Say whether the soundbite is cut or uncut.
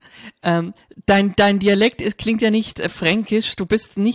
uncut